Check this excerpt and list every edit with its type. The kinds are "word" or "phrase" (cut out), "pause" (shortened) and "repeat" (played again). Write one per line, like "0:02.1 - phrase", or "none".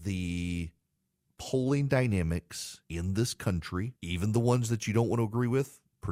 0:01.0 - pause
0:02.8 - pause
0:04.0 - pause